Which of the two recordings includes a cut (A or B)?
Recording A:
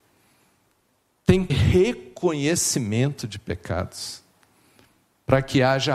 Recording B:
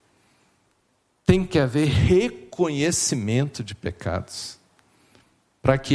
A